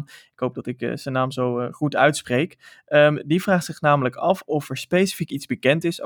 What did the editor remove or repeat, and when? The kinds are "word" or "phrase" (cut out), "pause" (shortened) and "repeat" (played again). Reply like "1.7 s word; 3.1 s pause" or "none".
none